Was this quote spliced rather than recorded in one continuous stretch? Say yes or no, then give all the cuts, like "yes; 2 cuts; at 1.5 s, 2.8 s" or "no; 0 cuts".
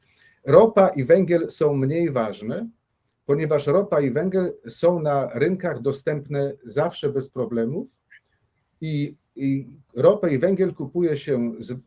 no; 0 cuts